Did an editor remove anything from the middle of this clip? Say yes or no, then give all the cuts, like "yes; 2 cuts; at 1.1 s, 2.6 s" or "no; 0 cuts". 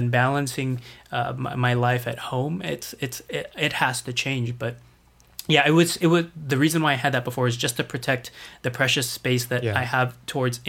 no; 0 cuts